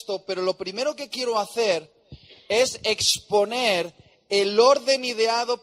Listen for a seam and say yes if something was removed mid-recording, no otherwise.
no